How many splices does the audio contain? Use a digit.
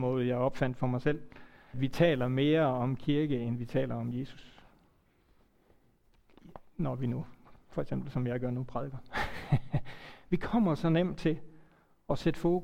1